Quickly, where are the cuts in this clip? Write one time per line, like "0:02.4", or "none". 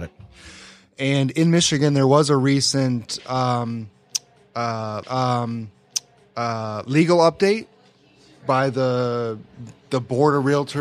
0:05.0

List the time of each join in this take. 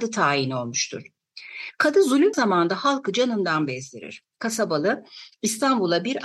0:02.3
0:04.3

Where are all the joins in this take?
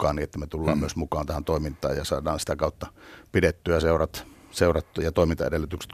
none

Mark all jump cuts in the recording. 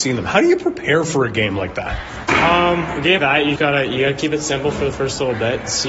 0:03.2
0:03.6

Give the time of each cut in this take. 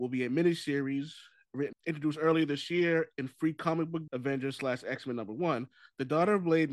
0:01.7
0:04.1

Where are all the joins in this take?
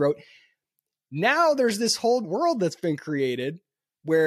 0:02.2

